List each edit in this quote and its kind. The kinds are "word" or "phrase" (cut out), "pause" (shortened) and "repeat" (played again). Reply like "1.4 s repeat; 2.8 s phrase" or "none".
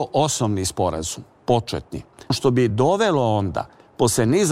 none